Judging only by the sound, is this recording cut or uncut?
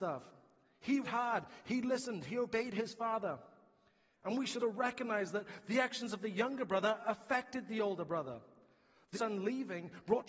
cut